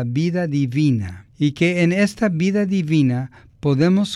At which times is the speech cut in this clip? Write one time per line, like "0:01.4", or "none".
0:01.3